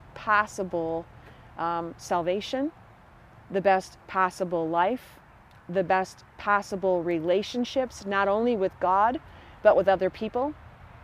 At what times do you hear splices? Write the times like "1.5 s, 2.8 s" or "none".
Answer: none

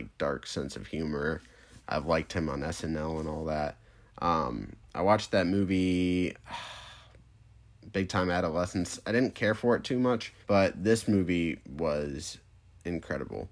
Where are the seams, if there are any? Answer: 10.4 s

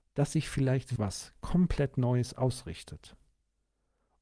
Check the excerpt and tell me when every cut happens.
1.0 s

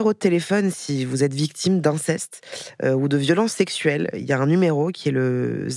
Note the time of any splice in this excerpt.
none

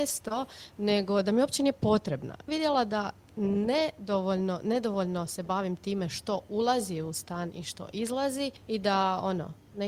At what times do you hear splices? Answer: 2.5 s, 8.6 s

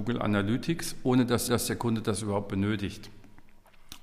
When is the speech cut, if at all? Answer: 1.5 s

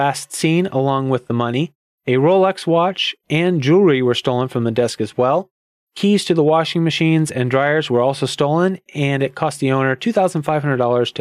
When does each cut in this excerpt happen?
none

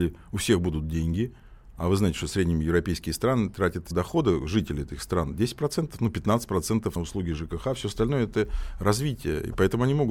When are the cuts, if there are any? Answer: 3.9 s, 7.0 s

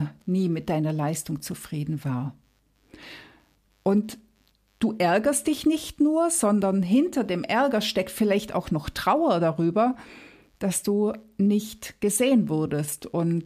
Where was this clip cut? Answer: none

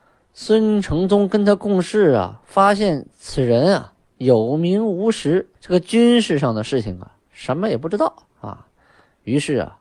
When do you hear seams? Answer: 5.6 s, 7.2 s, 8.3 s

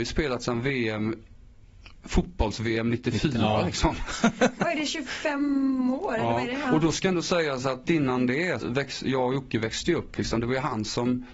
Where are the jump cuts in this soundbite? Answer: 7.8 s, 8.6 s

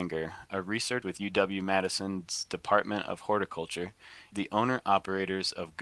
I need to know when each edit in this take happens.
1.0 s, 4.3 s

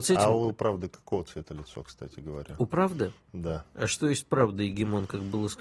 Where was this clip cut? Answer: none

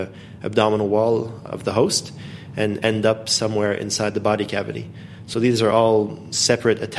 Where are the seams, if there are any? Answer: none

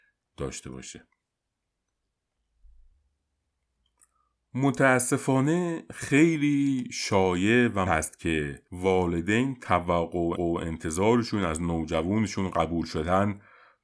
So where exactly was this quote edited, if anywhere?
7.9 s, 8.7 s, 10.4 s

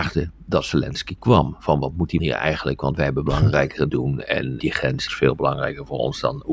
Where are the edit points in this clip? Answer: 2.2 s, 3.9 s, 4.6 s, 5.1 s

